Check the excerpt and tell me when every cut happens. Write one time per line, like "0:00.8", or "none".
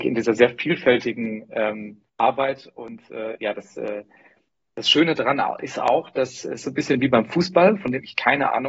0:02.1

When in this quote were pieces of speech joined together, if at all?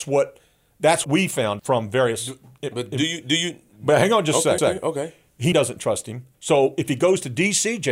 0:01.0
0:01.6
0:04.6
0:05.5
0:06.3

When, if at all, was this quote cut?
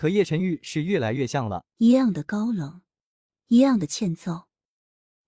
0:01.7

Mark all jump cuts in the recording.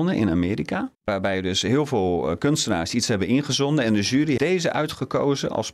0:00.9
0:04.4

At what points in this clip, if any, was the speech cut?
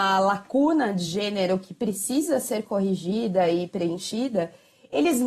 none

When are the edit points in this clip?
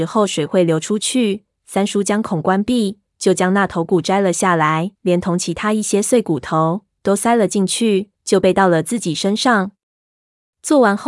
0:04.9
0:08.2

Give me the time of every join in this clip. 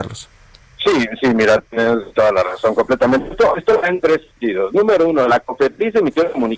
0:02.1

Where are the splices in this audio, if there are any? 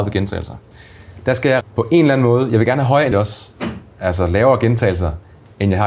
0:01.6
0:03.1

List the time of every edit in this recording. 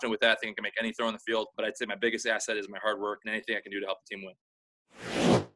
none

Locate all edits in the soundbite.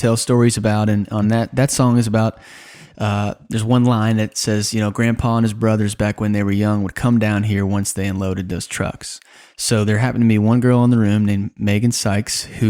none

